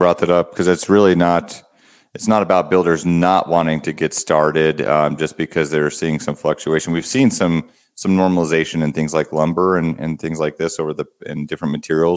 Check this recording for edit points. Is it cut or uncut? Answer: uncut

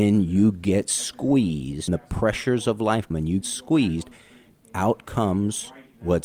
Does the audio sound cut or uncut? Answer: cut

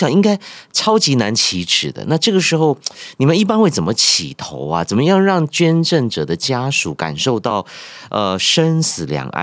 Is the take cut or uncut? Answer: uncut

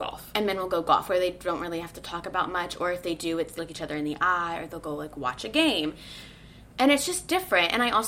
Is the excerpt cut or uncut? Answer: cut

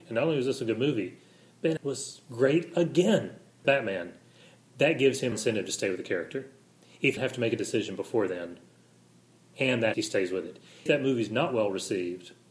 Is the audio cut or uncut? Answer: cut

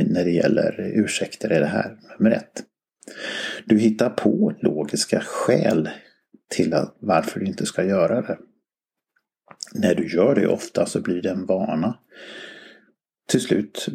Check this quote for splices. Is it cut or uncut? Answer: uncut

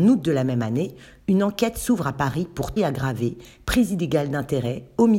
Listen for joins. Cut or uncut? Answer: cut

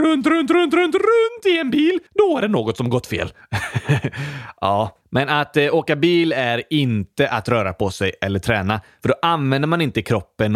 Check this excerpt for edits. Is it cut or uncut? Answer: cut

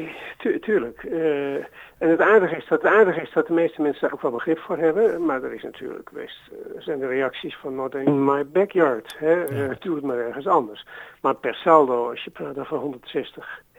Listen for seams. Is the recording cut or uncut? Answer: cut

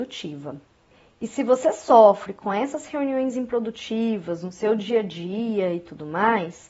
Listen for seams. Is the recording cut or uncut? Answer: uncut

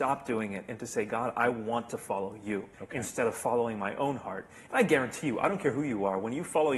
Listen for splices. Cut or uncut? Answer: cut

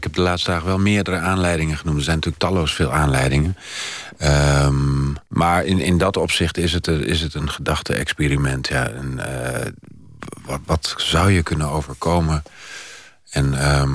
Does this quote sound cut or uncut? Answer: cut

